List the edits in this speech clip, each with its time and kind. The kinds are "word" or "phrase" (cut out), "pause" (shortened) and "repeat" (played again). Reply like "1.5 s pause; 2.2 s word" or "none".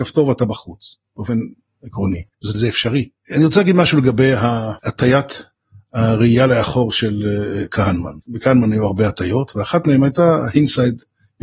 2.5 s phrase; 3.2 s pause; 4.8 s pause; 8.2 s pause